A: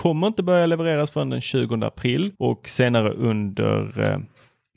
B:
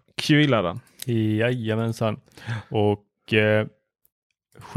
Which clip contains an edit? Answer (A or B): A